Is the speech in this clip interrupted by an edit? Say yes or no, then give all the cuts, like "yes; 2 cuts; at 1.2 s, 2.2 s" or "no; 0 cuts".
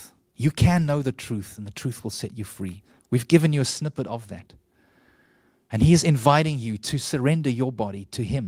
no; 0 cuts